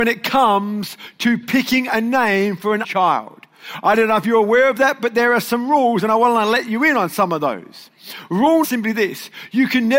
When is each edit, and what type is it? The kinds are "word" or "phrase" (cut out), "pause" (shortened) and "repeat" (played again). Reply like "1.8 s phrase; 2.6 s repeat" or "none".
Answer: 2.8 s word; 8.6 s phrase